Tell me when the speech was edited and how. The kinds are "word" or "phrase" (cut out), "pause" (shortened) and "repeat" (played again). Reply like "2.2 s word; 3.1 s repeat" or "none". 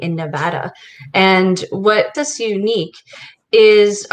2.1 s word